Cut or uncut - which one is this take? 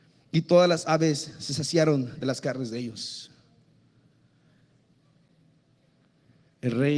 uncut